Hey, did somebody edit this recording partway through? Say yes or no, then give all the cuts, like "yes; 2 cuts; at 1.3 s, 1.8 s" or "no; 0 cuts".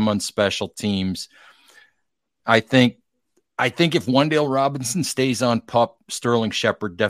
no; 0 cuts